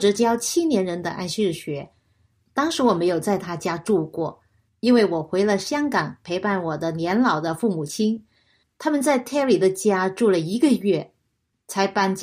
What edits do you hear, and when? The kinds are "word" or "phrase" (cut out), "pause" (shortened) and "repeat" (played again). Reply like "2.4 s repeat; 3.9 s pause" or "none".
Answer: none